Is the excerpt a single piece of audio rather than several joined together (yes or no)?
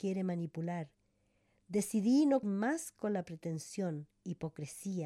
no